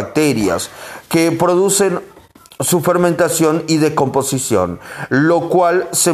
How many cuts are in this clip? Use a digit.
0